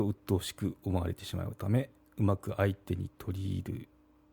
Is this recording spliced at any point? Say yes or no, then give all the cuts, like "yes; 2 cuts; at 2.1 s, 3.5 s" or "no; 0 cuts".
no; 0 cuts